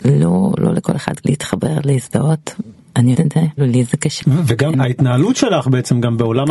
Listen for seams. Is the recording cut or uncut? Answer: cut